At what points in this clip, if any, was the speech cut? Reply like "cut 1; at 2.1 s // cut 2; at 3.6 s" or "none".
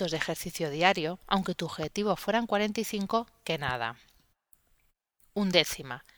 none